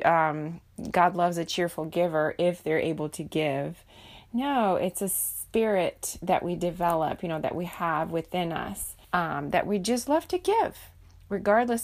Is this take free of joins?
no; 1 cut; at 9.0 s

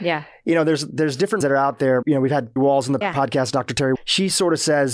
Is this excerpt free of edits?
no; 5 cuts; at 1.4 s, 2.0 s, 2.6 s, 3.0 s, 3.9 s

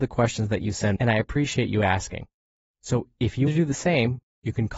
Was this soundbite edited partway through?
yes; 2 cuts; at 1.0 s, 3.5 s

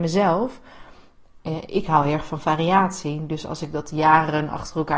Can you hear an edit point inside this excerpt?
no; 0 cuts

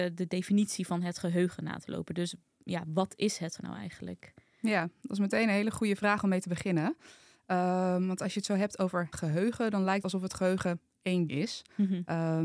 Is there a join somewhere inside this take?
yes; 4 cuts; at 3.6 s, 9.1 s, 10.0 s, 11.3 s

